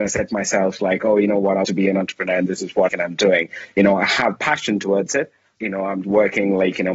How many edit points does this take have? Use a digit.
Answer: 4